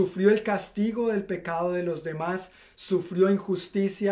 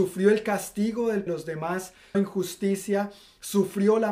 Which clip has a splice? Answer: second; 2 cuts; at 1.3 s, 2.1 s

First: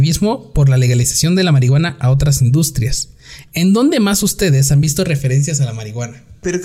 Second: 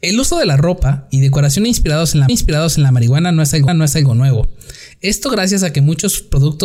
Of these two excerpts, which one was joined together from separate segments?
second; 2 cuts; at 2.3 s, 3.7 s

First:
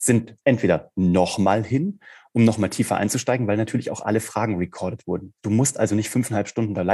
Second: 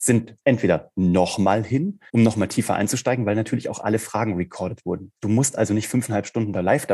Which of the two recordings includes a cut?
second; 1 cut; at 2.1 s

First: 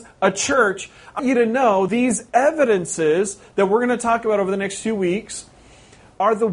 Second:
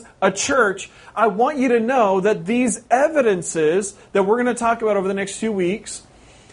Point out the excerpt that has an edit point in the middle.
first; 2 cuts; at 1.2 s, 1.9 s

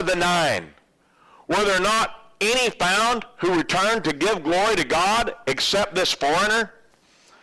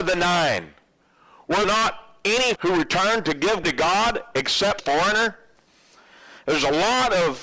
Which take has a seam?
second; 4 cuts; at 1.6 s, 2.6 s, 3.6 s, 4.8 s

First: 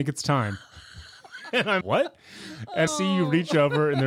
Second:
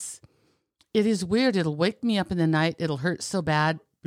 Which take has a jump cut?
first; 2 cuts; at 1.8 s, 2.9 s

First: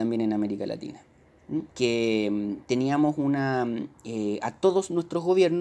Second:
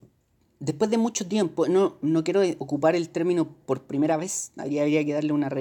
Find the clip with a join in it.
first; 1 cut; at 1.7 s

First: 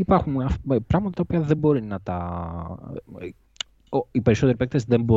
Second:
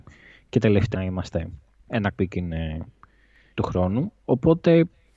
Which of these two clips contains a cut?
second; 3 cuts; at 0.9 s, 2.1 s, 3.5 s

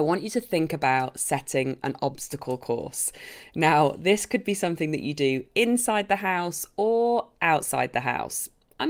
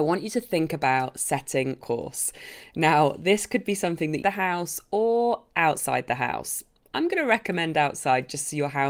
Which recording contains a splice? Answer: second; 2 cuts; at 1.8 s, 4.2 s

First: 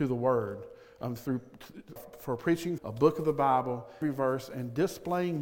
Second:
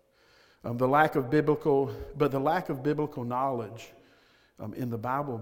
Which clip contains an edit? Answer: first; 3 cuts; at 2.0 s, 2.8 s, 4.0 s

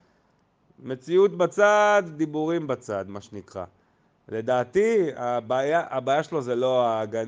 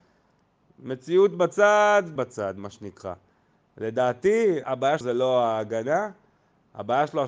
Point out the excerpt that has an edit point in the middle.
second; 3 cuts; at 2.2 s, 4.6 s, 5.0 s

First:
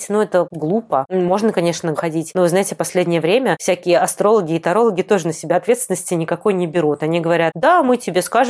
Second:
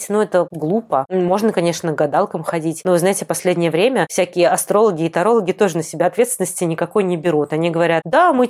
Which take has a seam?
first; 1 cut; at 1.9 s

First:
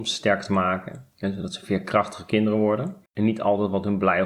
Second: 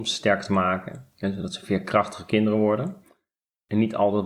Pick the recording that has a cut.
first; 1 cut; at 3.1 s

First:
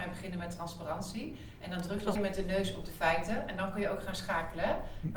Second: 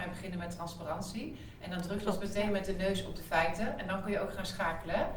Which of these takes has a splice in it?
first; 1 cut; at 2.2 s

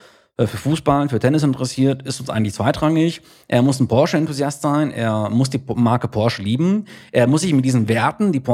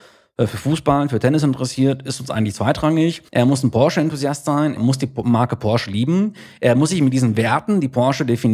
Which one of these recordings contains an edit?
second; 2 cuts; at 3.3 s, 4.8 s

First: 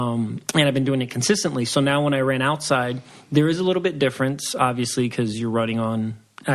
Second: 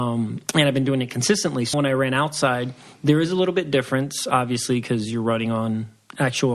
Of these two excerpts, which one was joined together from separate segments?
second; 1 cut; at 1.7 s

